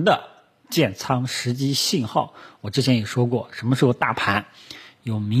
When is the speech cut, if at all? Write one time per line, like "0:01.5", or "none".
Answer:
none